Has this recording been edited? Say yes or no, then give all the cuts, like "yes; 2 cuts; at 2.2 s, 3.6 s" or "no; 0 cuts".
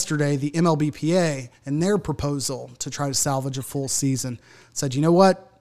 yes; 1 cut; at 1.5 s